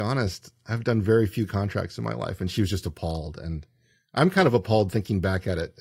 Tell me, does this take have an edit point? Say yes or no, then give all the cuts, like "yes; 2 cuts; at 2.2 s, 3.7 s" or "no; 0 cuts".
no; 0 cuts